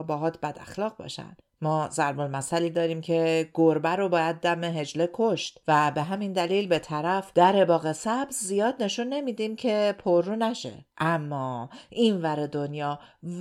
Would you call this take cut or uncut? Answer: cut